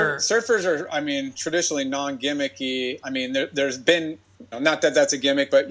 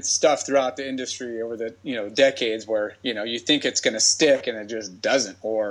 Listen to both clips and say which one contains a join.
first; 1 cut; at 4.5 s

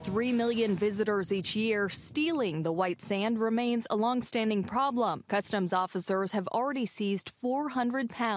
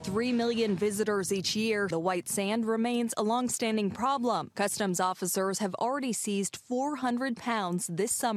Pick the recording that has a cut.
second; 1 cut; at 1.9 s

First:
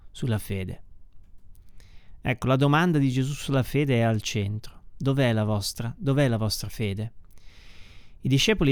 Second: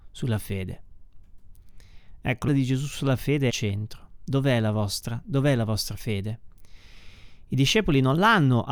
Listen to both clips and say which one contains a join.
second; 2 cuts; at 2.5 s, 3.5 s

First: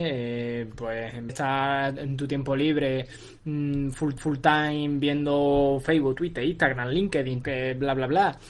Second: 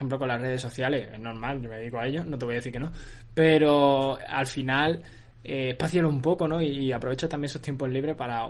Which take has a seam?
first; 3 cuts; at 1.3 s, 4.2 s, 7.4 s

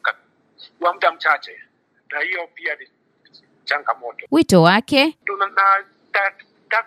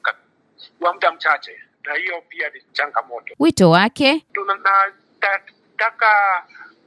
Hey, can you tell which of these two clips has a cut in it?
second; 2 cuts; at 1.7 s, 2.7 s

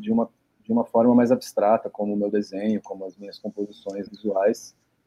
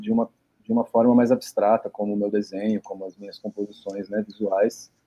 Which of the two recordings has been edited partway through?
first; 1 cut; at 4.1 s

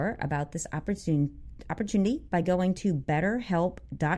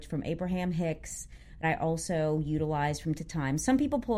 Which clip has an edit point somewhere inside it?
second; 2 cuts; at 1.6 s, 3.2 s

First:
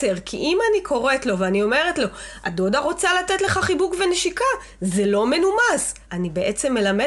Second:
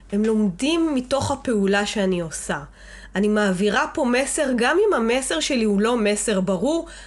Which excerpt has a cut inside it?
first; 1 cut; at 6.0 s

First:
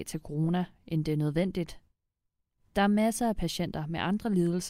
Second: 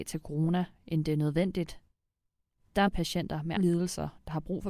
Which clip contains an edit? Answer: second; 2 cuts; at 2.9 s, 3.6 s

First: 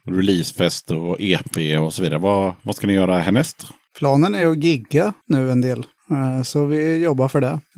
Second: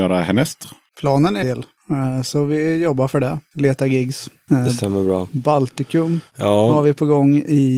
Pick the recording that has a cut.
second; 1 cut; at 1.4 s

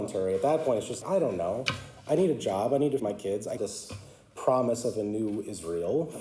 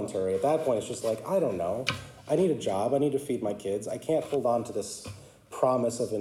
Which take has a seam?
first; 3 cuts; at 1.0 s, 3.0 s, 3.6 s

